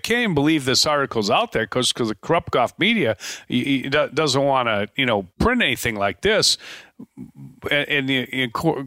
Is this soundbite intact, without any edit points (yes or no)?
no